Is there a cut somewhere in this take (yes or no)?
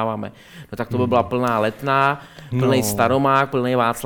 no